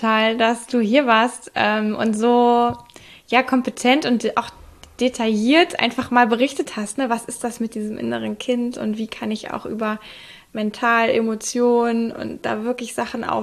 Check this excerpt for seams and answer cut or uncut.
uncut